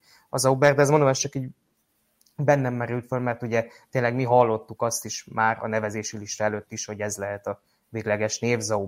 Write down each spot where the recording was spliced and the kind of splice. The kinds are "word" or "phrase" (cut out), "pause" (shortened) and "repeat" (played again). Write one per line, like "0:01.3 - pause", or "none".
none